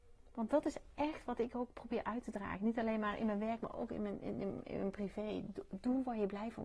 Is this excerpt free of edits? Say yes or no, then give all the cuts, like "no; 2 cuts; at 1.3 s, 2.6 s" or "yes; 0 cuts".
yes; 0 cuts